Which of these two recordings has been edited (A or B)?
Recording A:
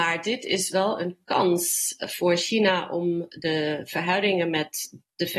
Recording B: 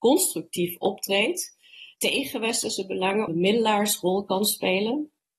B